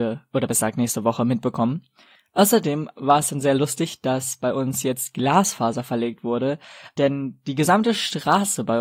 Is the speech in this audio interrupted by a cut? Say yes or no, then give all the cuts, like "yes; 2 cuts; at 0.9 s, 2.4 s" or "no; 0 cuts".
no; 0 cuts